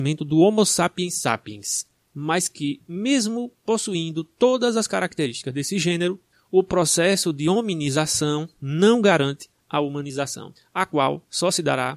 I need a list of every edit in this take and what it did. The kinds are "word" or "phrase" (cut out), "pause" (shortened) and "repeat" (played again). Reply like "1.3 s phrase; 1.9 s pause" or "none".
none